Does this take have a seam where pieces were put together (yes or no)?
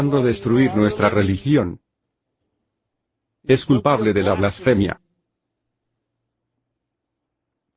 no